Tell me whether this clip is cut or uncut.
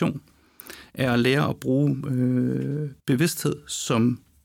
cut